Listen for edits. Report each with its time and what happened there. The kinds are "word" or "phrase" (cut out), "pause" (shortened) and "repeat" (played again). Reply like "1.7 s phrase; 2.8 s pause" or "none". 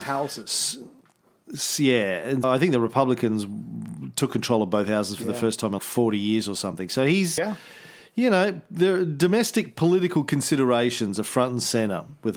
2.4 s word; 5.8 s word; 7.4 s word